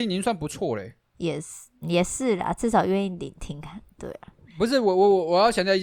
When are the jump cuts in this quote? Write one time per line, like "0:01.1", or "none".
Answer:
0:01.8